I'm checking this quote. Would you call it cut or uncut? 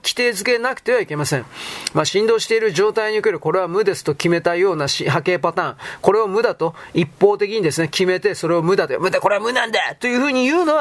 uncut